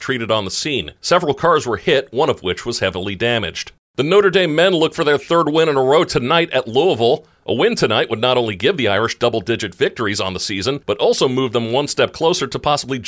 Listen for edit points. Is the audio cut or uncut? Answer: uncut